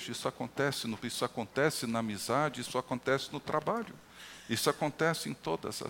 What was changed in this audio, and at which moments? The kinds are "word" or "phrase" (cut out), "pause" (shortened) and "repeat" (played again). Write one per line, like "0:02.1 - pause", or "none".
0:01.0 - word